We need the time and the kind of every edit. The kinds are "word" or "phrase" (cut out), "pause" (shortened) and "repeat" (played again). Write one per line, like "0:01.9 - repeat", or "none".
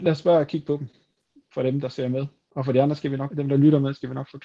0:03.3 - word